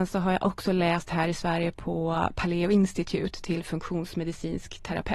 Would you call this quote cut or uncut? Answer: uncut